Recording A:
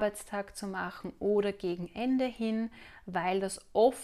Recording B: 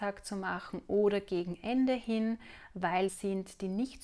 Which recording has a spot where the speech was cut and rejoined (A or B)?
B